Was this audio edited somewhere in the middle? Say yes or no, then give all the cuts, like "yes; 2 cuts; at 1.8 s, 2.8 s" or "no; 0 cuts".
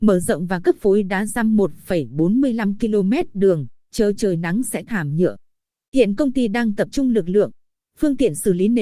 no; 0 cuts